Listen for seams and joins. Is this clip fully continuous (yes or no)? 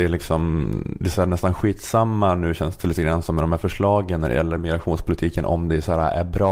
yes